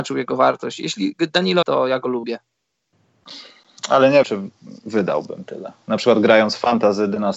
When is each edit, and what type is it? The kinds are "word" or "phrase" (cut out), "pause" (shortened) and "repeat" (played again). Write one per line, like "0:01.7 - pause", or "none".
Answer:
0:01.6 - phrase
0:04.2 - word